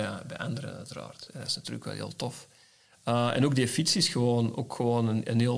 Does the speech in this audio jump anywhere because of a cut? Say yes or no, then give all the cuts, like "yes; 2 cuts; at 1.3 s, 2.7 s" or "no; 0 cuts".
no; 0 cuts